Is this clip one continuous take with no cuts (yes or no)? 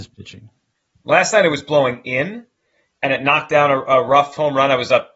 yes